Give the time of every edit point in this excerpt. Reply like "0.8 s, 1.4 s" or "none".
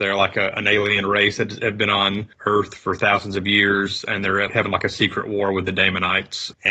4.5 s